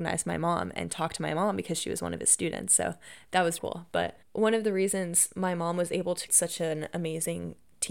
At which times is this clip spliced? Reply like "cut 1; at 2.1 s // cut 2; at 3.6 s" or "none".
cut 1; at 3.6 s // cut 2; at 4.2 s // cut 3; at 6.3 s